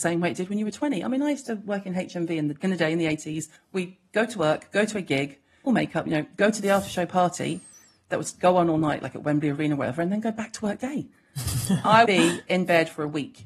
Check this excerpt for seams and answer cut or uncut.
cut